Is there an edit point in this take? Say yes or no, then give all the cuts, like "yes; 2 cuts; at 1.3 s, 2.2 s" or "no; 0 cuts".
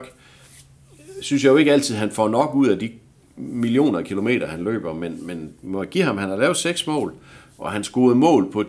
no; 0 cuts